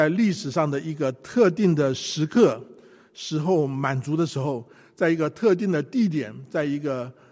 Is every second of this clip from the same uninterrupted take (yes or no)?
yes